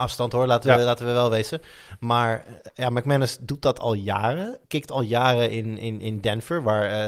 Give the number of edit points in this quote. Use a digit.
1